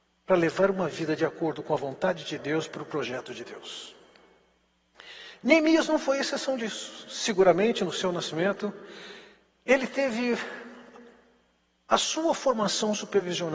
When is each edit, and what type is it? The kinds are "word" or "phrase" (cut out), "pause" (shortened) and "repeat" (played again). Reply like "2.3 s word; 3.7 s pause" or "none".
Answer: none